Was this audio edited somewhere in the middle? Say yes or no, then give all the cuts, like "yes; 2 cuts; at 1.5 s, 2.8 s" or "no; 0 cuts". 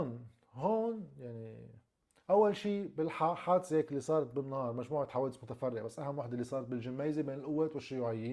no; 0 cuts